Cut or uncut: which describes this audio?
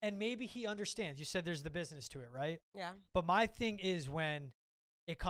cut